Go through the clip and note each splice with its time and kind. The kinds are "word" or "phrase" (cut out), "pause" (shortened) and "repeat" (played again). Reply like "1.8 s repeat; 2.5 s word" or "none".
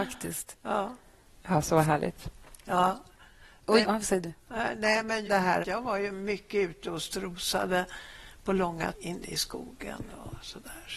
1.2 s pause; 3.8 s word; 5.3 s word; 5.6 s word; 8.9 s word